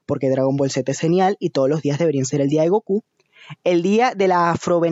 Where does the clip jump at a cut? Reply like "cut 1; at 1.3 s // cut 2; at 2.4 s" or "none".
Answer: none